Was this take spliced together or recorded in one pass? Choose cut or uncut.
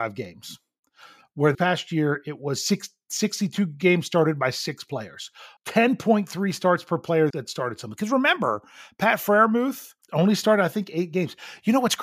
cut